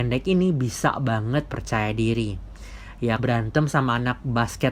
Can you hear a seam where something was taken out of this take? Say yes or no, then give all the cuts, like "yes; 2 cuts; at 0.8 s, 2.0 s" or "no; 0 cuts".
yes; 2 cuts; at 1.5 s, 3.2 s